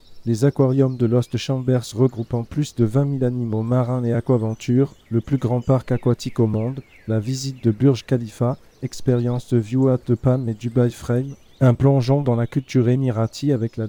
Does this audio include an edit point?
no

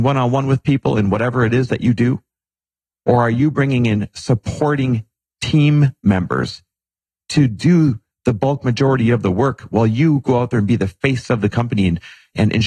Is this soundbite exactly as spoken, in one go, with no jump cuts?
yes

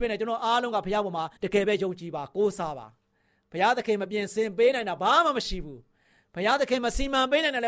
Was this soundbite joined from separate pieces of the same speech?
yes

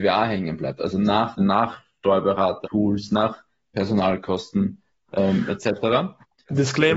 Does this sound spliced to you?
yes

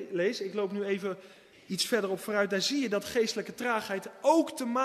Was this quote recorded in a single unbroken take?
yes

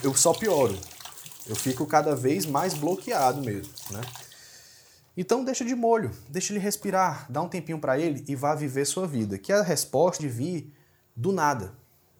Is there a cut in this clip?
yes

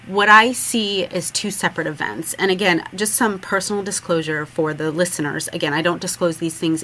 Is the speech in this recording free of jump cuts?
yes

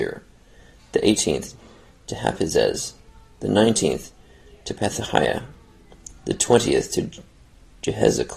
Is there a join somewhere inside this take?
no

